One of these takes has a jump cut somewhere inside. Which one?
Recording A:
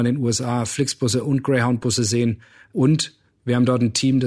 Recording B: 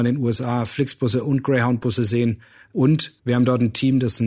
B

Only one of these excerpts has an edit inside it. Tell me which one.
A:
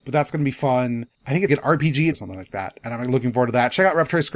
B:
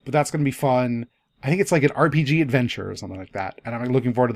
A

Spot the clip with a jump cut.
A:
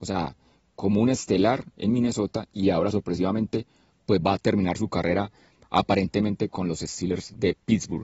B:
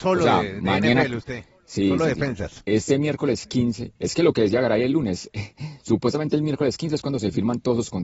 B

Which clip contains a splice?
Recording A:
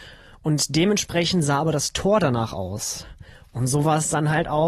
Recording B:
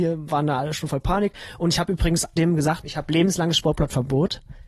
B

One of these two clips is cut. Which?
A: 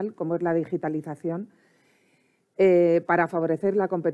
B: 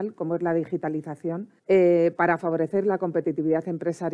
B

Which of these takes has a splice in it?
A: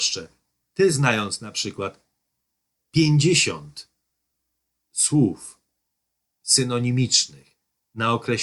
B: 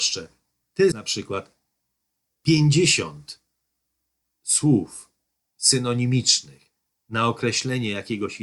B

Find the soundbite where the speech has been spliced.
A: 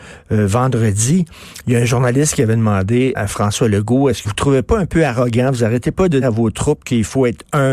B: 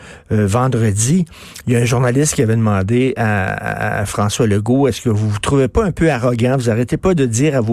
A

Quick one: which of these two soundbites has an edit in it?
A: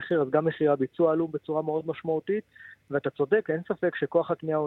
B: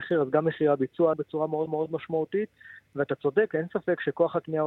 B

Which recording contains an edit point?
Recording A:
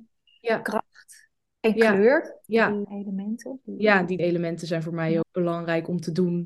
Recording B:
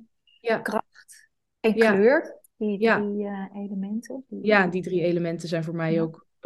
A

